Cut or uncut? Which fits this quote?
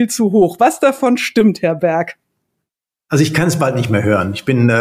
uncut